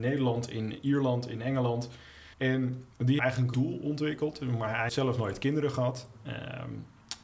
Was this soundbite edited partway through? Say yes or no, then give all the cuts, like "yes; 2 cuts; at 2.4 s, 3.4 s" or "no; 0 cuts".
yes; 4 cuts; at 2.3 s, 3.2 s, 3.5 s, 4.9 s